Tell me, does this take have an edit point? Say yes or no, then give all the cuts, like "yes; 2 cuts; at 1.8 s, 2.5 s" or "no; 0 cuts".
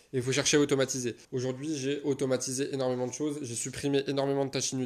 yes; 1 cut; at 1.2 s